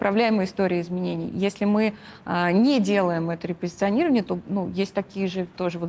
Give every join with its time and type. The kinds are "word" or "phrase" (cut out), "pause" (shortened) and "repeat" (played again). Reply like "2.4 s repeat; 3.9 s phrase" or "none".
none